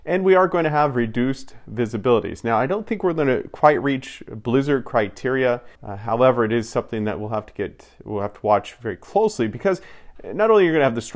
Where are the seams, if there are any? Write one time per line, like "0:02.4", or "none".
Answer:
0:05.7